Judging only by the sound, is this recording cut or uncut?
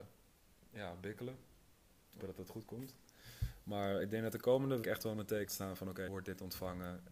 cut